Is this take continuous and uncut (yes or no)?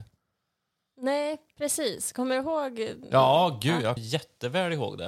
no